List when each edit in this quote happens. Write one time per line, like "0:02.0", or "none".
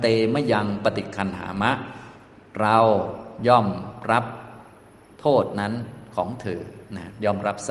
none